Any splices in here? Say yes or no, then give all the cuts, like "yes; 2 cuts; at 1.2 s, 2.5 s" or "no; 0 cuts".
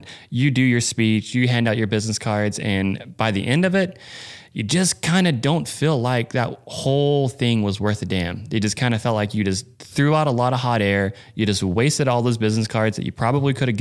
yes; 1 cut; at 9.7 s